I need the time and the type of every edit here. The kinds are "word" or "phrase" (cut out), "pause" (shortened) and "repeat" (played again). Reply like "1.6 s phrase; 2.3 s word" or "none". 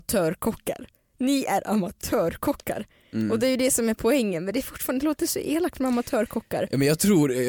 none